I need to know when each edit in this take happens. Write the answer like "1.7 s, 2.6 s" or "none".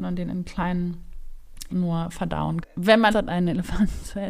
1.7 s, 2.6 s, 3.1 s